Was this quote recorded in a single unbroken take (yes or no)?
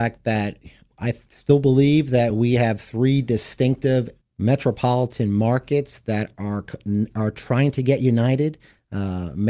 yes